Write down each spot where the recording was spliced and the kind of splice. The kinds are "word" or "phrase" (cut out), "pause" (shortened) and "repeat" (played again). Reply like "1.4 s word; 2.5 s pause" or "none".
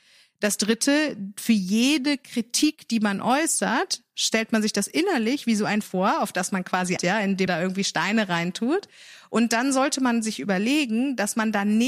5.8 s word; 7.0 s word; 7.5 s word